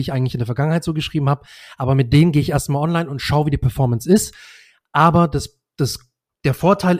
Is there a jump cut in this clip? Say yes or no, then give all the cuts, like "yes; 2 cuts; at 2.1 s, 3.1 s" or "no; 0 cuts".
no; 0 cuts